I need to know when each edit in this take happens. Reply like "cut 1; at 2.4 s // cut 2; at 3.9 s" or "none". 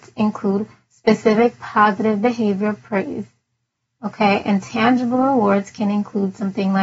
none